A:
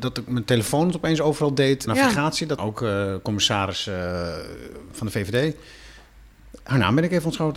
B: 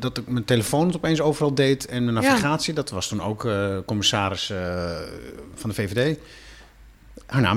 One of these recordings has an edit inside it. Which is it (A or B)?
A